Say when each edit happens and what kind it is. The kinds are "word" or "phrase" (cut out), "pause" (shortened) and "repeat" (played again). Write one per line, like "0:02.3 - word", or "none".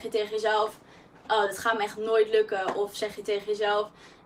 none